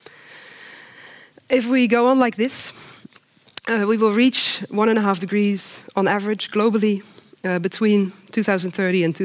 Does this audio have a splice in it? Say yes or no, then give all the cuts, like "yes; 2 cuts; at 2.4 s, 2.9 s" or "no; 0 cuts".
no; 0 cuts